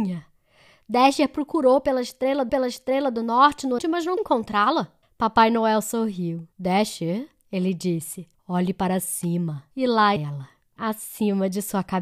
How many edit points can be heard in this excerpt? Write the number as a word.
nine